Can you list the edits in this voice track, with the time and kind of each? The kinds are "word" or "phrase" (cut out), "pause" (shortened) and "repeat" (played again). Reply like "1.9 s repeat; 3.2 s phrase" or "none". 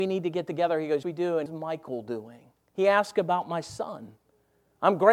1.0 s word; 1.5 s phrase; 2.6 s pause